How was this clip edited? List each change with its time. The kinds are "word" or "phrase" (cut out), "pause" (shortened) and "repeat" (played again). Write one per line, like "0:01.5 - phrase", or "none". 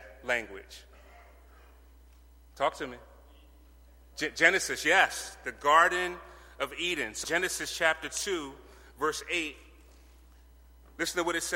0:07.2 - word